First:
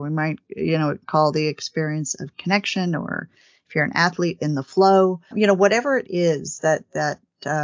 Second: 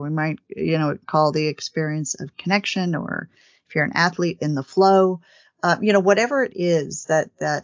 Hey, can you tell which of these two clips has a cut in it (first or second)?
first